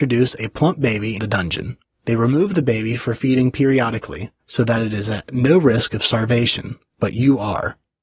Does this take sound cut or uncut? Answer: cut